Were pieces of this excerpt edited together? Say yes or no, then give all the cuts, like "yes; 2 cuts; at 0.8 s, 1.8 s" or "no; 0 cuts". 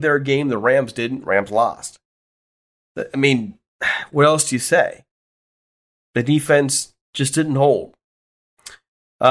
no; 0 cuts